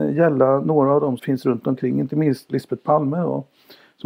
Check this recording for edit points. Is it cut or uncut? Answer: cut